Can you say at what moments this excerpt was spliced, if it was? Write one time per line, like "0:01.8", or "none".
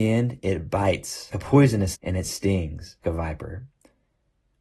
0:01.3
0:01.9
0:03.0